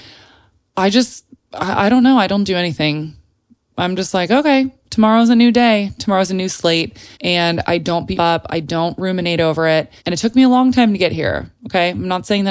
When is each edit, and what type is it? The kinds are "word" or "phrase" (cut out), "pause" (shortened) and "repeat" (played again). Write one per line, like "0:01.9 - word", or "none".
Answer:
0:07.1 - pause
0:08.2 - word
0:10.0 - pause

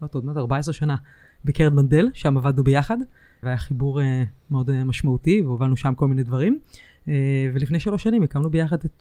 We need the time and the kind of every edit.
0:03.4 - word

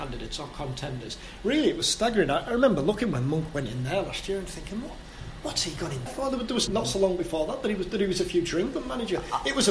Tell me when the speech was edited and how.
0:06.1 - word
0:06.7 - word

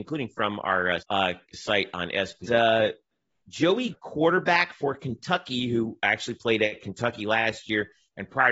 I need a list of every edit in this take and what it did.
0:01.0 - word
0:02.4 - phrase
0:03.9 - word

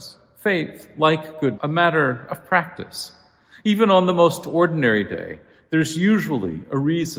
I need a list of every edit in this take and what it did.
0:01.6 - phrase

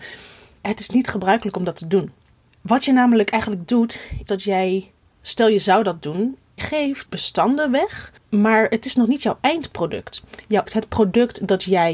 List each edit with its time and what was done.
0:04.3 - word
0:06.6 - word
0:07.1 - word
0:10.7 - word

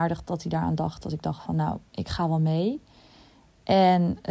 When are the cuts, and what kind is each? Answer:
0:01.9 - pause

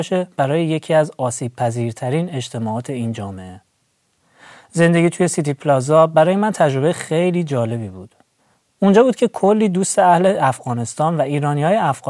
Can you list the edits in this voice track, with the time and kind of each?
none

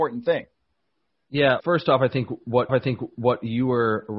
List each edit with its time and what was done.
0:01.6 - word
0:02.7 - repeat

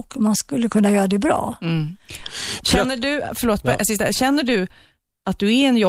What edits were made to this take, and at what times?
none

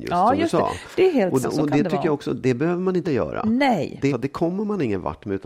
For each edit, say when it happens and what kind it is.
0:01.4 - word
0:03.0 - word
0:04.1 - phrase

